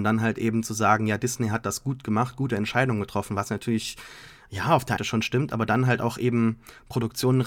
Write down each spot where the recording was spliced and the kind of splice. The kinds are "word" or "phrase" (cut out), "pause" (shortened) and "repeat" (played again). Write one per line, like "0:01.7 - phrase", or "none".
0:05.0 - phrase